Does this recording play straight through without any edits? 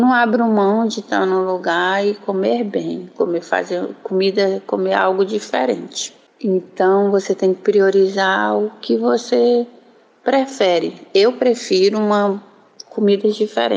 yes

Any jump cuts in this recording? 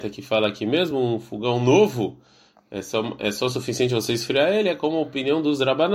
no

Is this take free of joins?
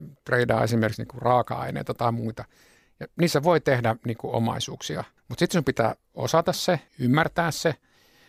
no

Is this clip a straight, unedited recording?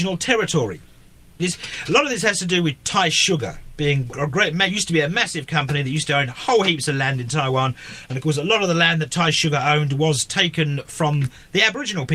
no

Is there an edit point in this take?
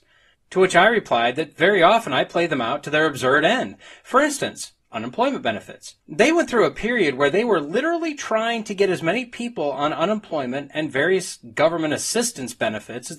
yes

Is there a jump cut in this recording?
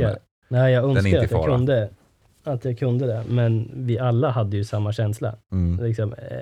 no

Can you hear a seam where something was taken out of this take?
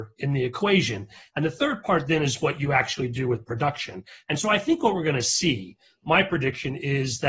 no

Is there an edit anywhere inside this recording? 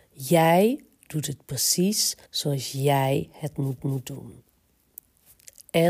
yes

